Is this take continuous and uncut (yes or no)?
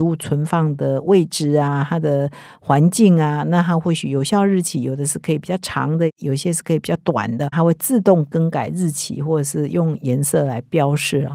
no